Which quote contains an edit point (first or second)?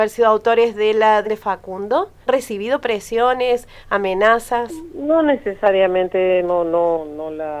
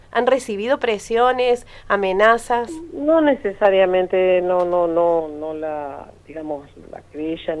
first